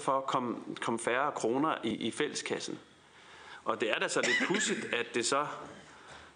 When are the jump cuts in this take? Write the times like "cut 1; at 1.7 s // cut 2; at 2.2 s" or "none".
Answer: cut 1; at 1.9 s